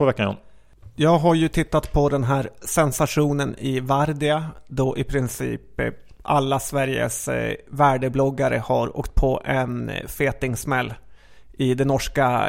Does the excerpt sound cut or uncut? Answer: uncut